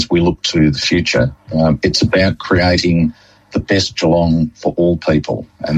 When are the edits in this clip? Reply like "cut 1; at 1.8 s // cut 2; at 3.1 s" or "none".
none